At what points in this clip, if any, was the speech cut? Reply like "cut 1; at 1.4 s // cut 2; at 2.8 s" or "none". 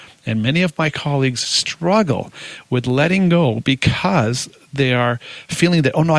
none